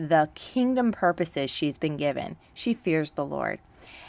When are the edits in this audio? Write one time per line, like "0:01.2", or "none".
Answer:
0:02.4

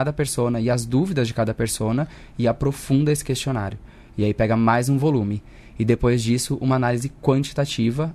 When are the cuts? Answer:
none

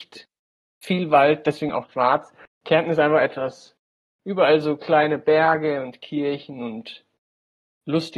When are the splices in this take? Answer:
none

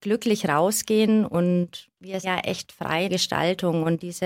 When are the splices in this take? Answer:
0:02.2
0:03.1

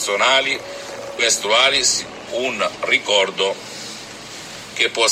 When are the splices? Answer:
0:01.2
0:02.3

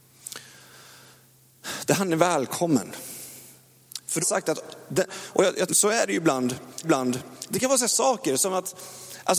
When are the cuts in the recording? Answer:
0:04.2
0:05.1
0:05.7
0:06.8
0:07.9

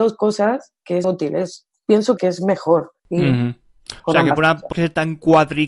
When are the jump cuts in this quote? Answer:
0:01.0
0:02.2
0:03.0
0:04.0
0:04.7

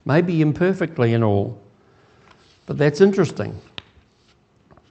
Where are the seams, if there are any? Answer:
none

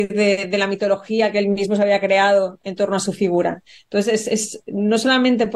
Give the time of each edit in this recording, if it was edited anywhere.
none

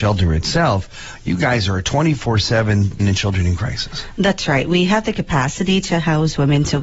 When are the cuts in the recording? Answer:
0:03.0

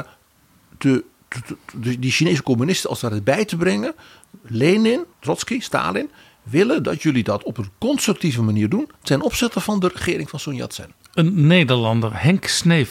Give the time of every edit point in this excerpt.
0:05.1

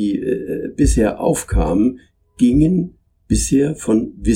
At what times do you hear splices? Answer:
none

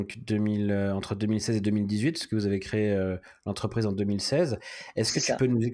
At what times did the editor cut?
none

